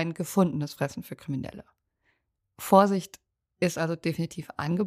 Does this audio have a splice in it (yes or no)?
no